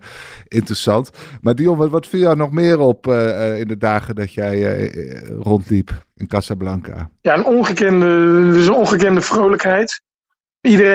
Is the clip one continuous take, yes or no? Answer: no